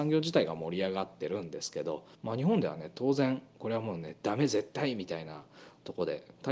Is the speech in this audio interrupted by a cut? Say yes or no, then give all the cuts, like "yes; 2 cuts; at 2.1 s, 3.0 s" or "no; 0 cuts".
yes; 1 cut; at 2.1 s